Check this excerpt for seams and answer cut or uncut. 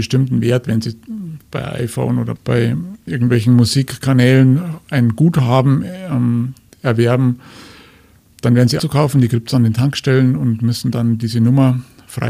cut